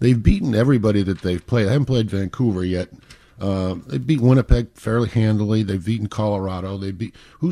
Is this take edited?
no; 0 cuts

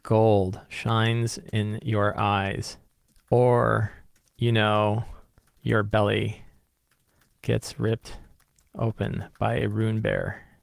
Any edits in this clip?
no; 0 cuts

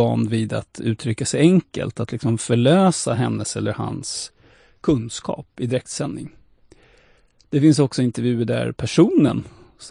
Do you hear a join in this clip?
no; 0 cuts

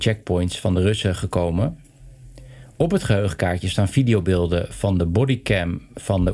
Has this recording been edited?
no; 0 cuts

